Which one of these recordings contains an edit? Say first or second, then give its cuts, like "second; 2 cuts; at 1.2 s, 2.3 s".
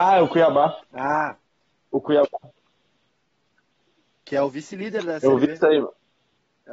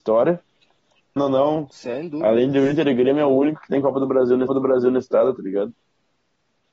second; 2 cuts; at 1.2 s, 4.5 s